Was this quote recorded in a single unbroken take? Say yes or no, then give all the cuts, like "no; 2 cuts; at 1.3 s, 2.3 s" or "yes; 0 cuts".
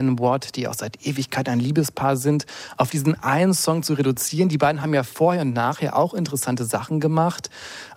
yes; 0 cuts